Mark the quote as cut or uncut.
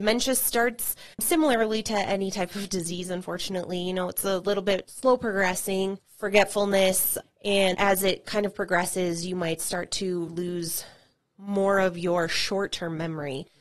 cut